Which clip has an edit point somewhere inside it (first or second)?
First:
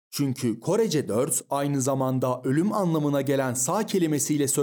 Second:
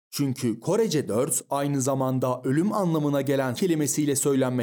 second